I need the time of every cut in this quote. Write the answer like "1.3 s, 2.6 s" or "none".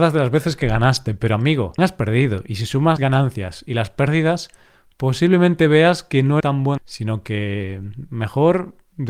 1.8 s, 3.0 s, 6.4 s, 6.8 s

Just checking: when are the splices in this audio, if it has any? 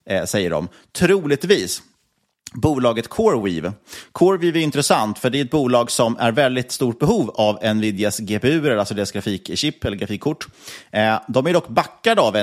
none

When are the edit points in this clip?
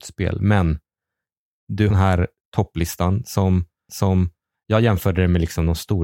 1.9 s, 3.9 s

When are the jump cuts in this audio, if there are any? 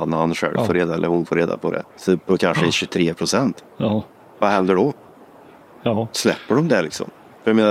1.9 s, 3.7 s

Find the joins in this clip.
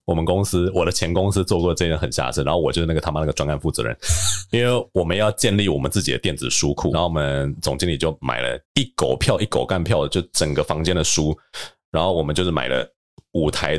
6.9 s, 8.6 s

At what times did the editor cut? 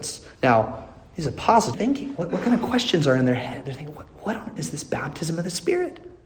1.7 s, 4.6 s

